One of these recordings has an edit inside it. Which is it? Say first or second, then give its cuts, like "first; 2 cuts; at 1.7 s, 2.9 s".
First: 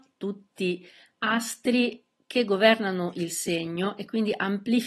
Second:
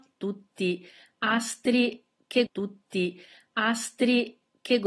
second; 1 cut; at 2.5 s